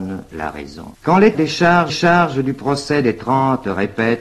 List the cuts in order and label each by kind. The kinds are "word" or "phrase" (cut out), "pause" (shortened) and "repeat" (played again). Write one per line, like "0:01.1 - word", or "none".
0:00.9 - pause
0:01.3 - word
0:01.9 - repeat